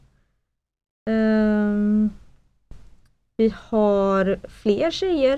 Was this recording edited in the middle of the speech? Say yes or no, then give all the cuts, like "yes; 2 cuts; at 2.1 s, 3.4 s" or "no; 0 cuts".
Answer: no; 0 cuts